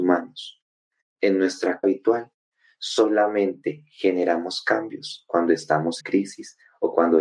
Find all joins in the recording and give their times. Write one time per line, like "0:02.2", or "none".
0:01.8
0:06.0